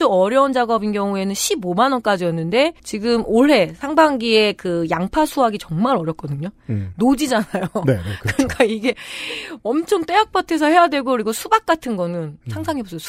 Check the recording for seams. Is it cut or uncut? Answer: cut